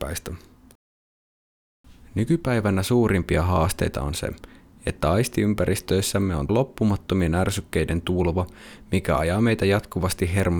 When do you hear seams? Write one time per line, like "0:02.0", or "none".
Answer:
0:06.5